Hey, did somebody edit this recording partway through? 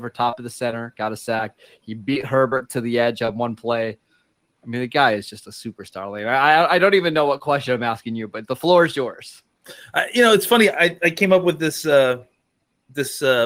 no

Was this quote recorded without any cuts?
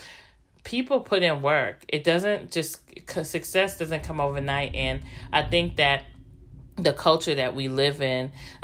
yes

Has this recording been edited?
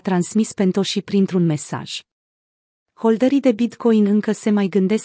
no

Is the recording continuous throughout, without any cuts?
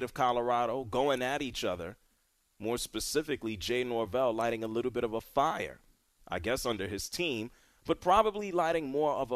yes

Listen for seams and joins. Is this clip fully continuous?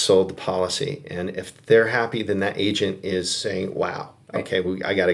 yes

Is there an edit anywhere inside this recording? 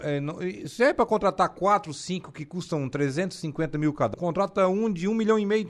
yes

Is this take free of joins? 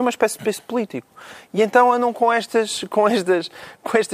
yes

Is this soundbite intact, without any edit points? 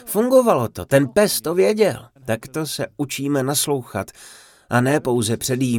no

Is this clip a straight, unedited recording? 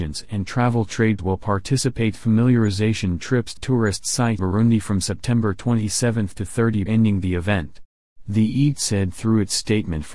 no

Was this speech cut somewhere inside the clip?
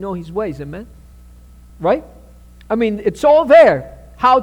yes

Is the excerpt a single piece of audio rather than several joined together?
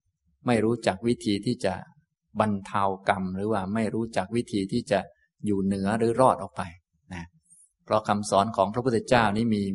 yes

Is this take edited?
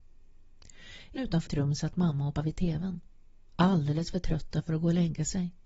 yes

